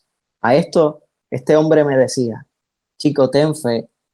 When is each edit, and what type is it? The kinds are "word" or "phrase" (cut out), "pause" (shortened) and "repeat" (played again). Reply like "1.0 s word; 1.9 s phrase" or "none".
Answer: none